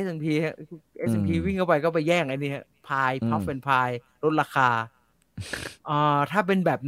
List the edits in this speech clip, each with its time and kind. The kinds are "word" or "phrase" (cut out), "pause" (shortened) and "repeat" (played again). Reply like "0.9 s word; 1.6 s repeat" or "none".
5.8 s pause